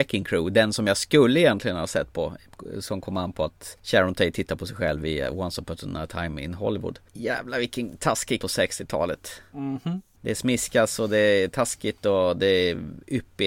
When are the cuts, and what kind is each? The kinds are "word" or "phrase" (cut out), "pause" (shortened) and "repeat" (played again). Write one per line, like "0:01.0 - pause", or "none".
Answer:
0:08.4 - phrase